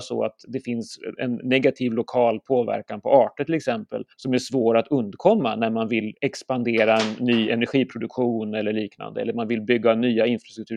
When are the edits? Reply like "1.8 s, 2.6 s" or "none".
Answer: 1.2 s, 4.1 s, 6.2 s